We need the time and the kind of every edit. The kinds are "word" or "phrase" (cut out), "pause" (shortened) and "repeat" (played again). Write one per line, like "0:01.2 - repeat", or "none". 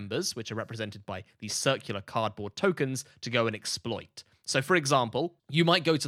none